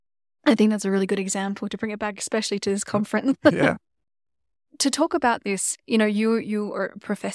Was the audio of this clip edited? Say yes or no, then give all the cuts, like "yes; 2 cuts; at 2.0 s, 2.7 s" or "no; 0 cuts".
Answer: yes; 2 cuts; at 4.7 s, 5.8 s